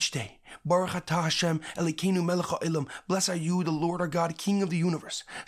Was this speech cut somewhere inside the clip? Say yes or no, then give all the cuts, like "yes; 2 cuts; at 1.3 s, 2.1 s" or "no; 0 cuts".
no; 0 cuts